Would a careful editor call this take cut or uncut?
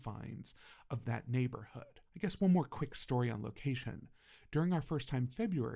cut